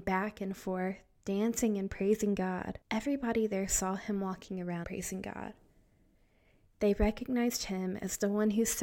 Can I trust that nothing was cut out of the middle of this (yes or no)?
no